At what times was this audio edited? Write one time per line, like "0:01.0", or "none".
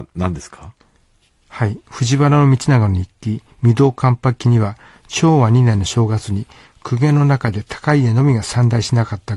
none